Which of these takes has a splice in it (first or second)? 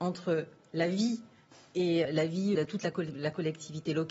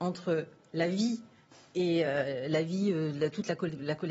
first